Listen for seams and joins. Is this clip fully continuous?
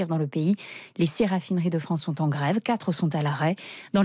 yes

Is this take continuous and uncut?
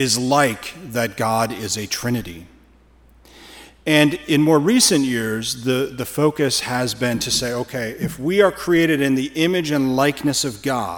yes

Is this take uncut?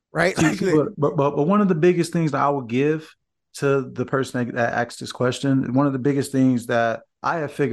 yes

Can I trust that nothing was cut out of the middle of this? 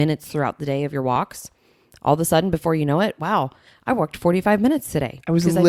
yes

